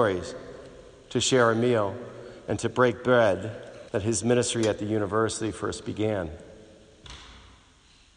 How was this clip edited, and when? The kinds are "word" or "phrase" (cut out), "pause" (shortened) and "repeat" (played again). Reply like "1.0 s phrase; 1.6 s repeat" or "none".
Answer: 3.9 s pause